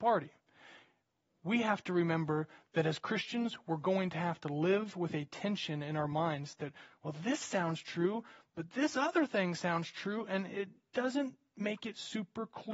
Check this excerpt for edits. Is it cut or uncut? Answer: uncut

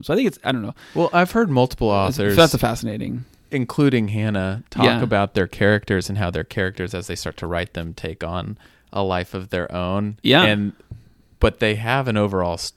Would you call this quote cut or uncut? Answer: uncut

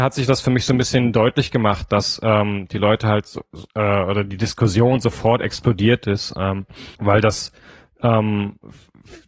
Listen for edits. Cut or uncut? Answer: cut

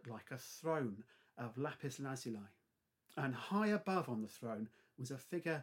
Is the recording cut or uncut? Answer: uncut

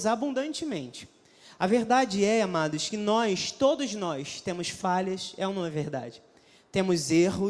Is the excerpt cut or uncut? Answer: uncut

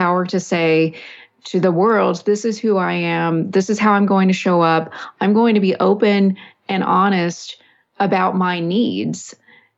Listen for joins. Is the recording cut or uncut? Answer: uncut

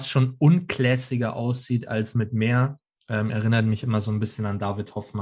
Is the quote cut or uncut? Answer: uncut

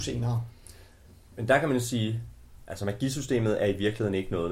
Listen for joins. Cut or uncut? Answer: uncut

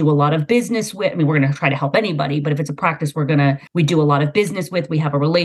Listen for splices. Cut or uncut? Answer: cut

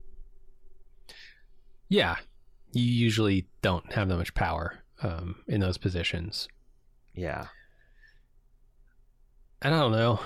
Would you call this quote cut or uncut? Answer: uncut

